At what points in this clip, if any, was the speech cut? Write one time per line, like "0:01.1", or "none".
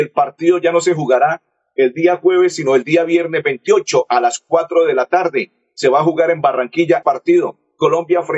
0:07.0